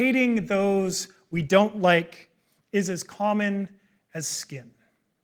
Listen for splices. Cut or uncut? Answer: uncut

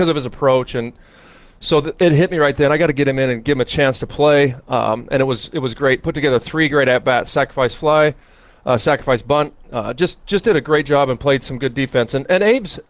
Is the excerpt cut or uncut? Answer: uncut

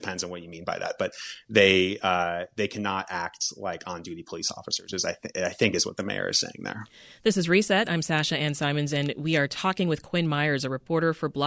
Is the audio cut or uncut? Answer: uncut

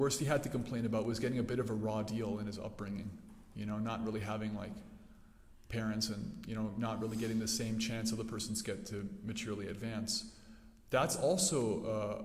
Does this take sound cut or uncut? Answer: uncut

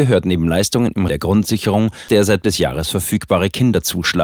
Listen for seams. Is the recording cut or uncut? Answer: cut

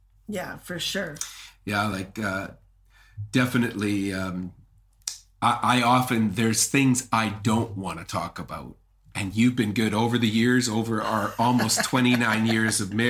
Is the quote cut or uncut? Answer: uncut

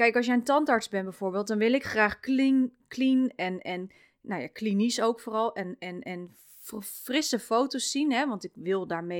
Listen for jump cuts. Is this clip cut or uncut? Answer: uncut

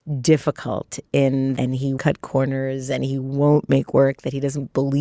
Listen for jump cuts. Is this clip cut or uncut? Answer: cut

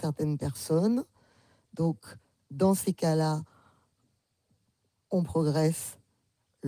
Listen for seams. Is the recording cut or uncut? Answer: uncut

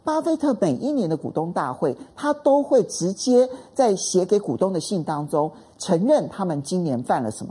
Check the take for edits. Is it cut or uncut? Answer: uncut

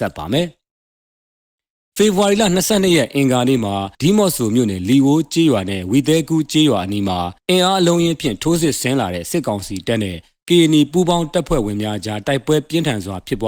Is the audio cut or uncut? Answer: cut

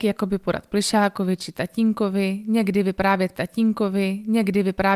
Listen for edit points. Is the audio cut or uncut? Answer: cut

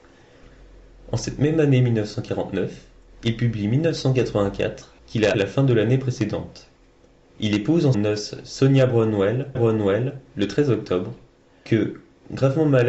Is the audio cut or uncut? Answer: cut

